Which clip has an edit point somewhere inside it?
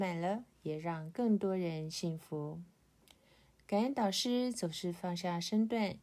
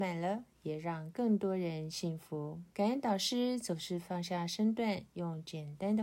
second; 1 cut; at 2.7 s

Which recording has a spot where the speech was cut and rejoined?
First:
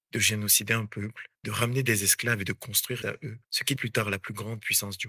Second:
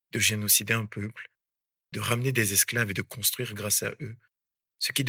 first; 4 cuts; at 1.4 s, 3.0 s, 3.4 s, 3.8 s

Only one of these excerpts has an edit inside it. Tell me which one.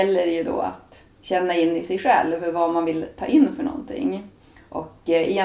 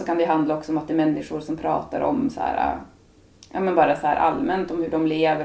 first; 1 cut; at 1.1 s

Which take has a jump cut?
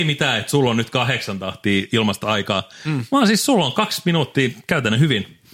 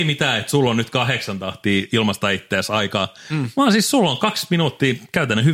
first; 1 cut; at 2.2 s

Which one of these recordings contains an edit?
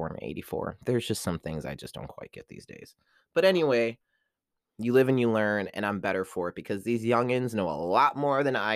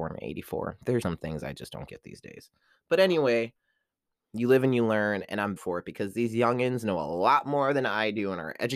second; 3 cuts; at 1.0 s, 1.9 s, 5.6 s

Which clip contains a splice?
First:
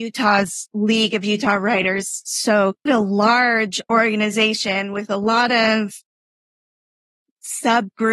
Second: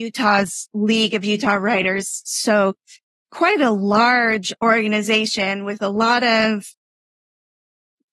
first; 1 cut; at 2.9 s

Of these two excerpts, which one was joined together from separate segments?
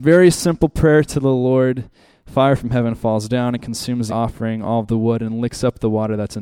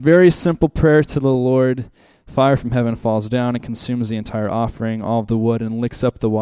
first; 1 cut; at 4.1 s

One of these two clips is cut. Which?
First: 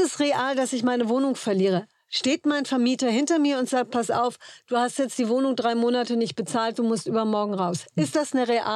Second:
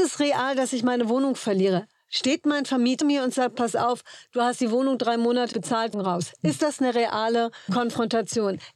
second; 5 cuts; at 3.0 s, 4.6 s, 5.5 s, 5.9 s, 7.7 s

